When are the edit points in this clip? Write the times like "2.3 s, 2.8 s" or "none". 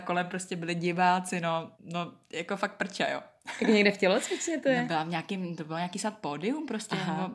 1.7 s